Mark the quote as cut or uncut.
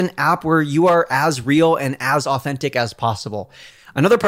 uncut